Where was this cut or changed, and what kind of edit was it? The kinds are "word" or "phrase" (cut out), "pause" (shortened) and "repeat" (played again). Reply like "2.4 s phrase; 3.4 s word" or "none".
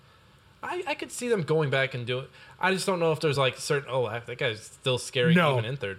none